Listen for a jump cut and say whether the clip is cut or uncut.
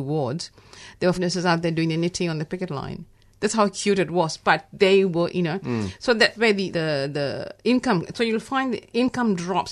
cut